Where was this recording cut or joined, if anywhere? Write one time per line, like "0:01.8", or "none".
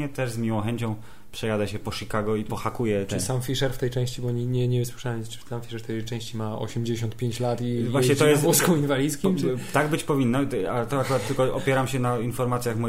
none